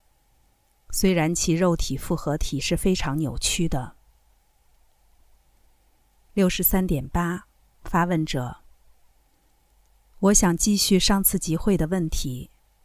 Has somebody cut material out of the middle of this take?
no; 0 cuts

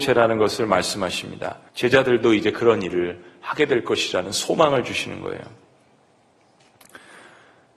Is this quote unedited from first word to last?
no; 1 cut; at 1.7 s

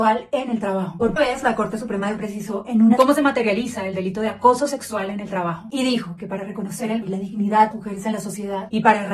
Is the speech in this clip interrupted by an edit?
yes; 5 cuts; at 1.2 s, 2.2 s, 3.0 s, 7.0 s, 7.7 s

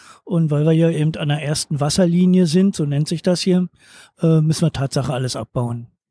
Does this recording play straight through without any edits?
yes; 0 cuts

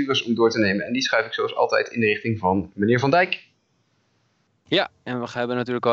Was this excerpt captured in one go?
yes; 0 cuts

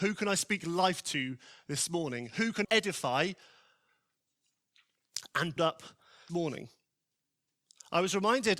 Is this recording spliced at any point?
yes; 3 cuts; at 2.6 s, 5.6 s, 6.3 s

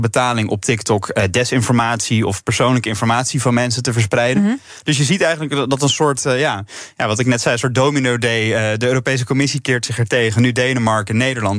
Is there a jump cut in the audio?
no; 0 cuts

